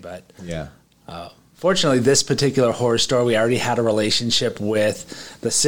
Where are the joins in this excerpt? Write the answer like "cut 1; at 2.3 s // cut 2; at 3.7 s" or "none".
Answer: none

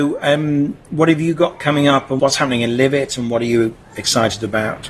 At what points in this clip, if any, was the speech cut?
cut 1; at 2.2 s

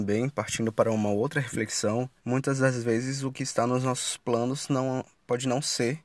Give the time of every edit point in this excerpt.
cut 1; at 2.2 s

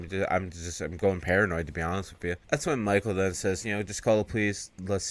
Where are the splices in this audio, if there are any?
none

